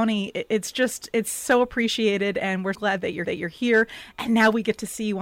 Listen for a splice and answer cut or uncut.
cut